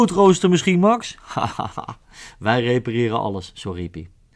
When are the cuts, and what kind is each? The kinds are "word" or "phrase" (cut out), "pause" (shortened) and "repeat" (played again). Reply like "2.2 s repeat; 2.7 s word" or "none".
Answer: none